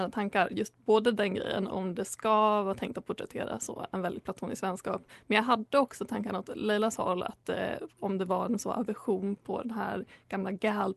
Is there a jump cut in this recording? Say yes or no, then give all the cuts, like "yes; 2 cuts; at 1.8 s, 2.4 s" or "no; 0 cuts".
no; 0 cuts